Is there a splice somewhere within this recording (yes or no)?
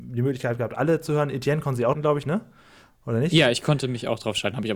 yes